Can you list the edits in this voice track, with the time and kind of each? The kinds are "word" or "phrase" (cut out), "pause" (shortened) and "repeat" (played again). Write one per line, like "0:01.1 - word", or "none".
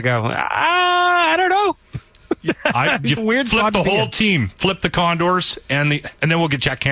0:03.2 - word